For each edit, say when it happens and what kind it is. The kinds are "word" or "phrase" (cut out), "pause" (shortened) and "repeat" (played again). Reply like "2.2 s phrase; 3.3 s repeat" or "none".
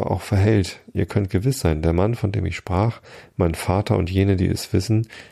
none

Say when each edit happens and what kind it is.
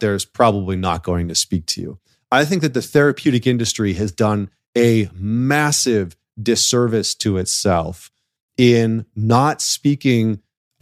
none

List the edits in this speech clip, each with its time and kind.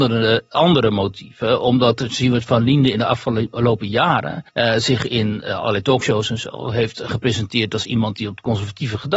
4.5 s pause

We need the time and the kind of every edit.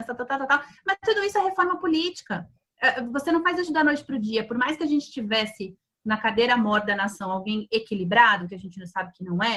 none

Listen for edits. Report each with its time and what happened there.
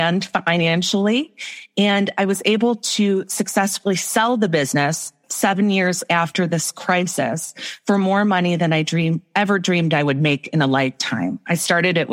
none

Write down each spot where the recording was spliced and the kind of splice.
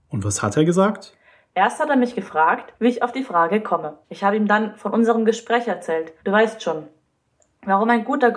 2.7 s pause; 4.0 s pause; 6.2 s pause

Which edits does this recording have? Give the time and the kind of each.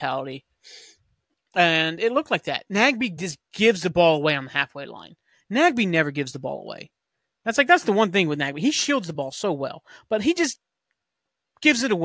none

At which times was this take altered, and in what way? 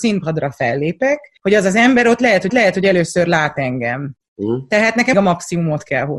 1.4 s pause; 2.5 s repeat; 5.1 s phrase

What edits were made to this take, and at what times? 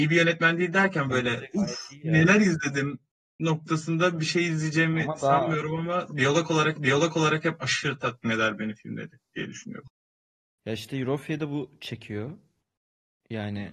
6.8 s repeat

